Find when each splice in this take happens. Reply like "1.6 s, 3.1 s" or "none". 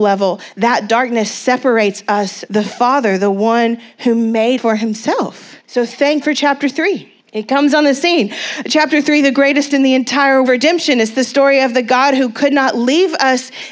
2.5 s, 4.6 s, 5.6 s, 6.2 s, 7.2 s, 9.7 s, 10.4 s